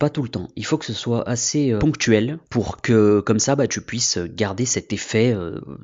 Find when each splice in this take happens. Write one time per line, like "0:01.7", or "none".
0:02.5